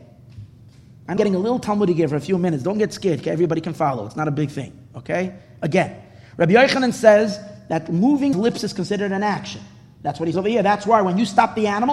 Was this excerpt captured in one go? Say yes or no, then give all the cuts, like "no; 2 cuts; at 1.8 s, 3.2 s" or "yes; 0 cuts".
no; 3 cuts; at 1.2 s, 8.3 s, 10.3 s